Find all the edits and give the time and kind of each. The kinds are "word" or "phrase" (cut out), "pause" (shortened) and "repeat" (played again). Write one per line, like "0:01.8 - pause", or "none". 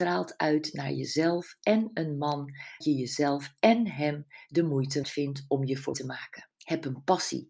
0:02.8 - word
0:05.0 - word
0:05.9 - word
0:06.5 - pause

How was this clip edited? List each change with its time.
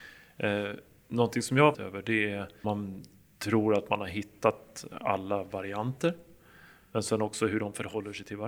0:01.7 - word
0:02.6 - phrase

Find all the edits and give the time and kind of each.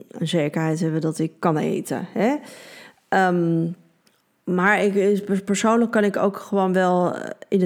0:04.0 - pause

